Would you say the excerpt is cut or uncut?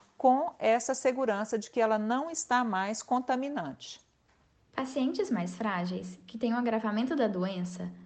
uncut